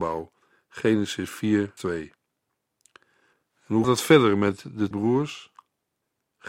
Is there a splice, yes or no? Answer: yes